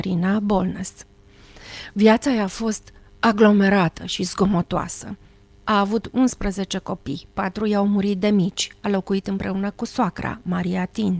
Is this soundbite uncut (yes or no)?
yes